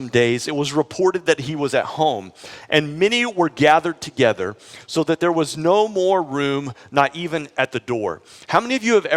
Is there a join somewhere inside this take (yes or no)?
no